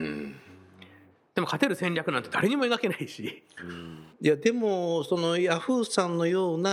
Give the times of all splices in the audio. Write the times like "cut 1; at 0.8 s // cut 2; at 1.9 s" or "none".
cut 1; at 4.1 s